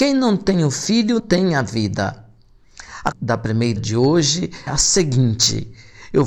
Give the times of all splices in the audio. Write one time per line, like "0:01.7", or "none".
0:01.2
0:03.1
0:03.8
0:04.7